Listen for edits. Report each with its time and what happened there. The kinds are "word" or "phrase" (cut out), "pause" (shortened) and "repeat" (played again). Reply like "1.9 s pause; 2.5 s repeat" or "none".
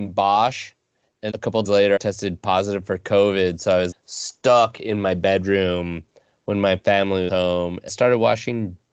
1.3 s word; 1.6 s word; 2.0 s word; 3.9 s word; 7.3 s word; 7.9 s word